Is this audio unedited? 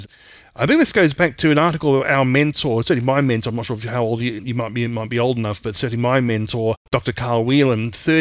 no; 2 cuts; at 4.4 s, 6.8 s

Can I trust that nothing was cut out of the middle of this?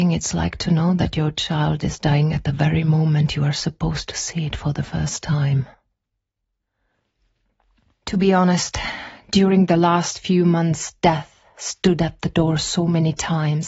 yes; 0 cuts

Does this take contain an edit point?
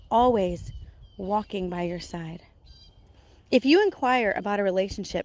no; 0 cuts

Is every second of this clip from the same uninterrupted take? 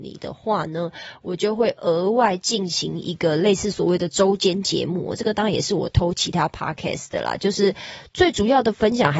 yes; 0 cuts

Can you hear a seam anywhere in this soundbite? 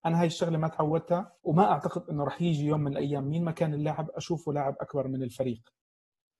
yes; 1 cut; at 1.4 s

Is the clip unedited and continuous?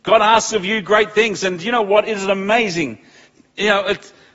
yes; 0 cuts

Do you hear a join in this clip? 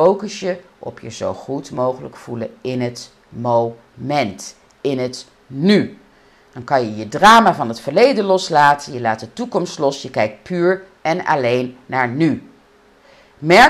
no; 0 cuts

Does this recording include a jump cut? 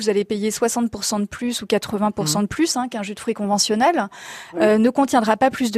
no; 0 cuts

